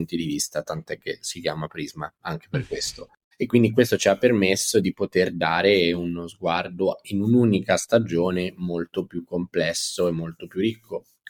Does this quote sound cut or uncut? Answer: uncut